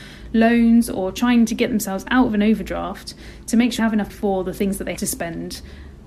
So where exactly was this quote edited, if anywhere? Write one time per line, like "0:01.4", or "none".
0:03.8
0:04.1
0:05.0